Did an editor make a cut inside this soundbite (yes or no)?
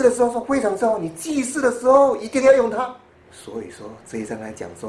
yes